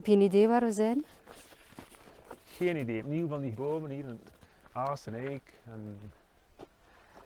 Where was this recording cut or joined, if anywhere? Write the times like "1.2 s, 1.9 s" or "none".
3.0 s, 3.5 s, 5.1 s